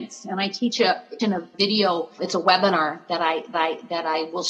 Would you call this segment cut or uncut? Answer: cut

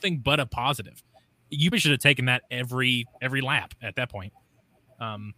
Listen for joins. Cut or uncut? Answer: cut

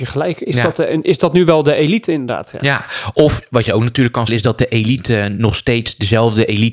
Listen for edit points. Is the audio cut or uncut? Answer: cut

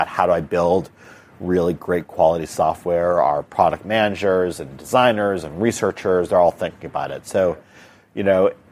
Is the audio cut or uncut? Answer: uncut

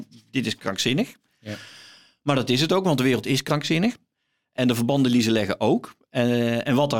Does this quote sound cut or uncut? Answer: uncut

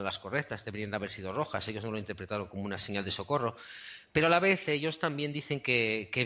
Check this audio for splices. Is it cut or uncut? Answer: uncut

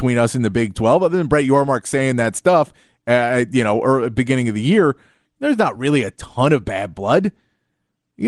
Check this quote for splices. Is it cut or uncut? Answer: uncut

